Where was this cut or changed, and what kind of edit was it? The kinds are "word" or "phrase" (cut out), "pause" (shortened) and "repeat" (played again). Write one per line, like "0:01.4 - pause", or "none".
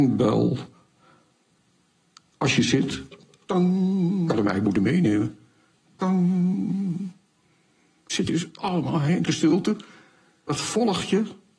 0:09.3 - word